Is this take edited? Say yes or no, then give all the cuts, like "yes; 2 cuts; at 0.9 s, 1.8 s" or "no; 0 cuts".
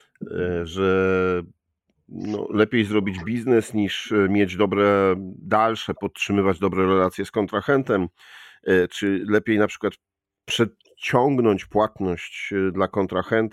no; 0 cuts